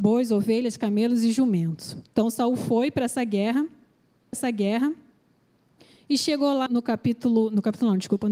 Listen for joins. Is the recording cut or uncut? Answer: cut